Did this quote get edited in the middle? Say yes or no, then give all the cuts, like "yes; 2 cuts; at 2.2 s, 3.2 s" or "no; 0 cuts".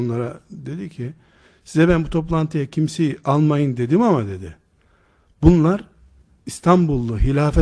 no; 0 cuts